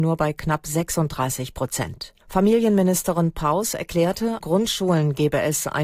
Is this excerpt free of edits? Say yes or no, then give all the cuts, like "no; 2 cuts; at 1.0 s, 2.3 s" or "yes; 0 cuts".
no; 2 cuts; at 2.2 s, 4.4 s